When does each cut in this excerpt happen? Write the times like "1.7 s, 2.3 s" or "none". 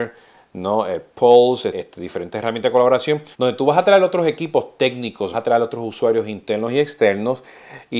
1.7 s, 3.3 s, 5.3 s